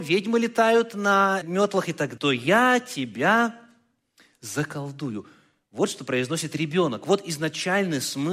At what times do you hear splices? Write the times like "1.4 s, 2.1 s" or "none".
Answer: 1.4 s, 2.2 s